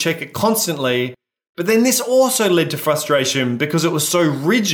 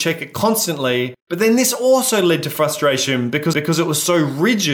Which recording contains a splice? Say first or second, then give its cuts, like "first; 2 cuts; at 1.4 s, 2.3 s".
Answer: second; 2 cuts; at 1.2 s, 3.5 s